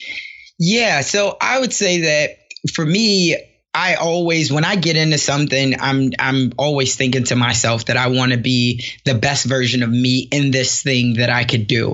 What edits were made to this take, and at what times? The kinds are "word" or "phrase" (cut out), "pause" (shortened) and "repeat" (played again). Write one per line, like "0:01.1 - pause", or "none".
none